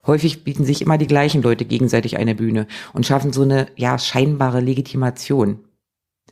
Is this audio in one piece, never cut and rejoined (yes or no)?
yes